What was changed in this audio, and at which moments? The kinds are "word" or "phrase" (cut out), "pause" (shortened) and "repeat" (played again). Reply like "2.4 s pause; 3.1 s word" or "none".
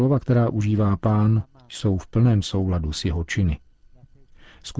none